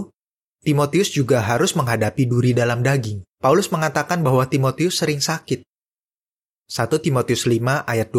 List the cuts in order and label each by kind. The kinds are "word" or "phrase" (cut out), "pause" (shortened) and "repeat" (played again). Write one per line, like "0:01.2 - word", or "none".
0:03.3 - pause

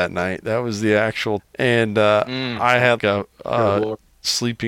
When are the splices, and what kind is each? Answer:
0:01.4 - word
0:03.0 - word

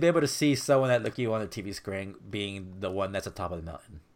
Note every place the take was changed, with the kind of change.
0:01.1 - word

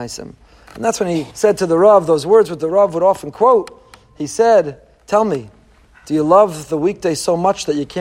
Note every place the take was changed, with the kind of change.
0:01.3 - pause

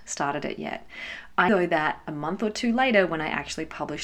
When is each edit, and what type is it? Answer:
0:01.5 - word

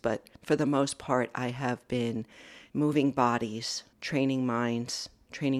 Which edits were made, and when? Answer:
0:02.7 - pause
0:03.9 - pause

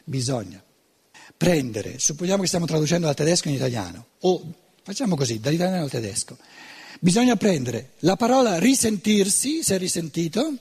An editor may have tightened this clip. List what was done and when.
0:01.1 - pause
0:04.1 - pause

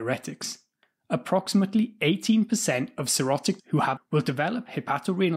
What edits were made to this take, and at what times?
0:03.6 - word
0:04.0 - word

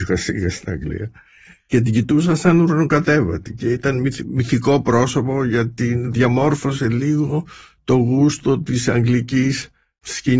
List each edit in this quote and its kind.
none

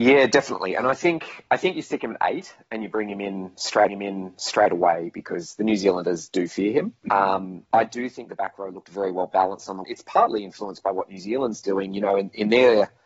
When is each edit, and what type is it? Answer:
0:03.9 - repeat
0:07.0 - pause
0:07.7 - pause
0:09.8 - phrase

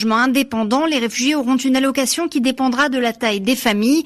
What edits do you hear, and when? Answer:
none

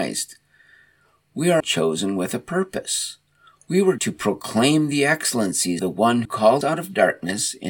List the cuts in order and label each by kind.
0:01.6 - word
0:04.0 - word
0:05.8 - word
0:06.2 - word
0:06.6 - word

